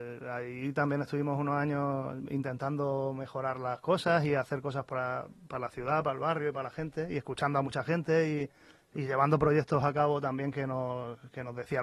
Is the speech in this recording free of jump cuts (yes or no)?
yes